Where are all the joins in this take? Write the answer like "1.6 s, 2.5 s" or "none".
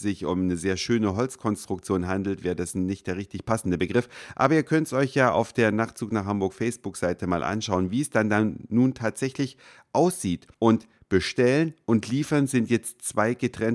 10.5 s